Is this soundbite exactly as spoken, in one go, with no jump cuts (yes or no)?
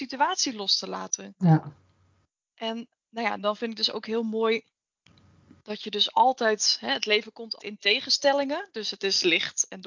no